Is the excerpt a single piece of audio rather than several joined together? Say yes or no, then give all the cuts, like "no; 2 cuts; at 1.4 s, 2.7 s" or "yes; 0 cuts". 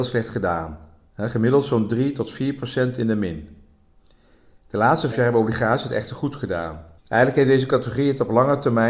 no; 2 cuts; at 5.1 s, 7.0 s